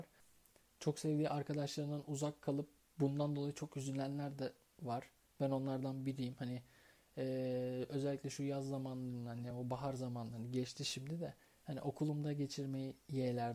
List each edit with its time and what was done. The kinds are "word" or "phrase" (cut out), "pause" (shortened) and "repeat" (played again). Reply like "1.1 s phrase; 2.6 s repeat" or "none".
none